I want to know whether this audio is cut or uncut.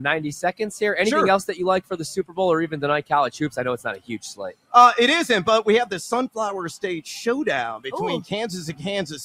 uncut